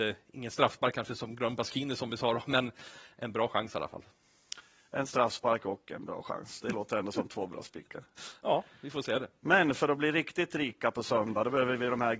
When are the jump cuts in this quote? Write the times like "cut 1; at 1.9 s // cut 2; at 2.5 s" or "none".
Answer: none